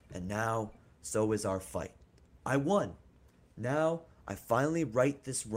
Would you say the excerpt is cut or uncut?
uncut